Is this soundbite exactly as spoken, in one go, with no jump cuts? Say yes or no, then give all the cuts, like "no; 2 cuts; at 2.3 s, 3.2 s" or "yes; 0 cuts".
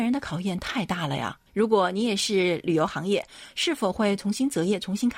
no; 1 cut; at 1.5 s